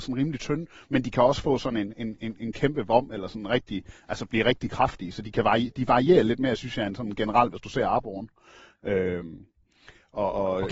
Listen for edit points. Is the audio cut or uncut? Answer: uncut